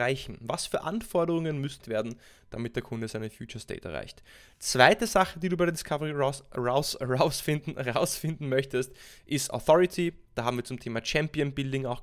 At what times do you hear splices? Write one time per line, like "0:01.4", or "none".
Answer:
0:01.8